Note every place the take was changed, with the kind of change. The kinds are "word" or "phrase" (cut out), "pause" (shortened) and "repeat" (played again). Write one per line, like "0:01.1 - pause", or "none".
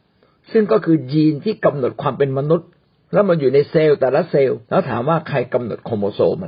0:04.6 - pause

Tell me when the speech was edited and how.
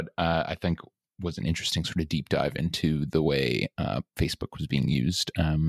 none

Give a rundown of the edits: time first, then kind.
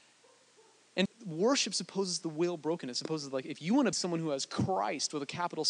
0:01.1 - word
0:03.9 - word

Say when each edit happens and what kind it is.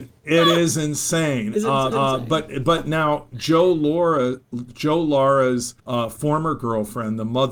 0:01.9 - repeat
0:05.8 - pause

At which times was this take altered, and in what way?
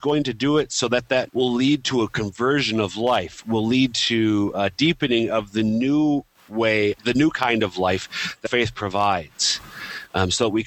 0:01.3 - word
0:07.0 - word
0:08.5 - word

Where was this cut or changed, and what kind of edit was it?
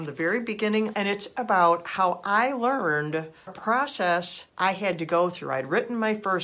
0:00.9 - phrase
0:03.5 - word
0:04.5 - pause

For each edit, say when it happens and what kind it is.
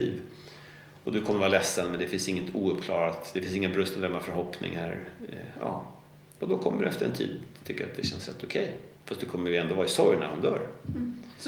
0:09.0 - pause

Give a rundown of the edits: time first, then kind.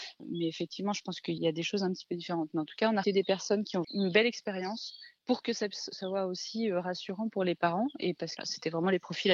0:03.0 - word
0:03.8 - word
0:08.4 - phrase

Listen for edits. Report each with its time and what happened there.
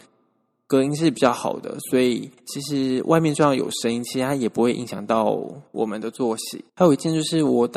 0:02.4 - pause
0:05.7 - pause
0:06.7 - pause

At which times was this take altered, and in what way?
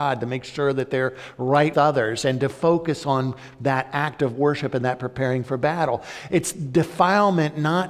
0:01.7 - word

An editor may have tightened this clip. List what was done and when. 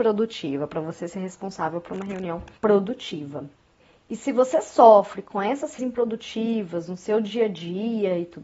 0:02.6 - pause
0:05.8 - word

